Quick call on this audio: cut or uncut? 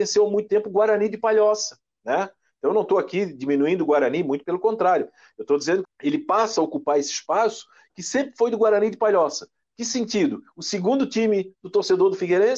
cut